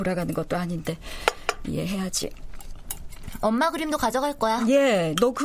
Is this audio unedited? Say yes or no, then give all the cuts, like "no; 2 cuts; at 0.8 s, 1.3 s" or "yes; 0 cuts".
yes; 0 cuts